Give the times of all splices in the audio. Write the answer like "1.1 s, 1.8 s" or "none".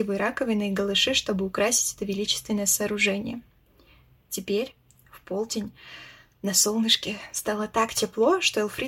none